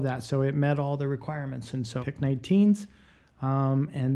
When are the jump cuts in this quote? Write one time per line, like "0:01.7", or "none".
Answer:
0:02.0